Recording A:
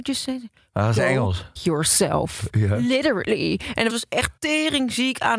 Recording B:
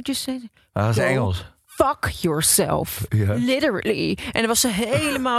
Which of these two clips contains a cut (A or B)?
A